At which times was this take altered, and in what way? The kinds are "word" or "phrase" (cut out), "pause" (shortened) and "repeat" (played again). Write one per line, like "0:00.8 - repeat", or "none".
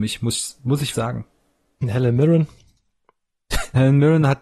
0:00.9 - word

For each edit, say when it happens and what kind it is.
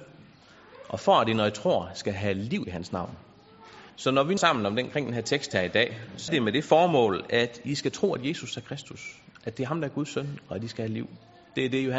0:03.9 - pause
0:04.4 - word
0:06.3 - word

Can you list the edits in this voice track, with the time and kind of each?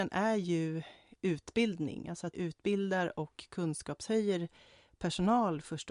0:01.1 - word
0:02.3 - word

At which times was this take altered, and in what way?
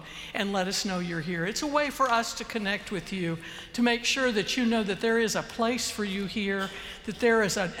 none

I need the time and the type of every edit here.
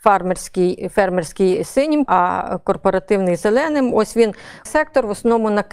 0:02.1 - word
0:04.7 - word

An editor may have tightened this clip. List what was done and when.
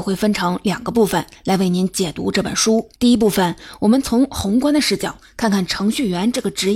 0:03.0 - pause

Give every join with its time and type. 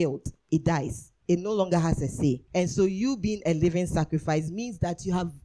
0:01.2 - pause
0:02.5 - pause

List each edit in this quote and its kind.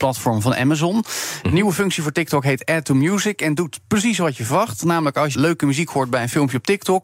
0:05.3 - word

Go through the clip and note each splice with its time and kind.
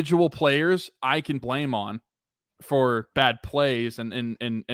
0:01.4 - word
0:03.1 - pause

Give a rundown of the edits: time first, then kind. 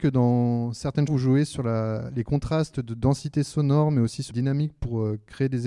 0:01.1 - word
0:04.3 - word

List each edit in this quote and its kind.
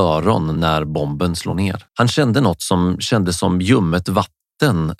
0:01.9 - pause

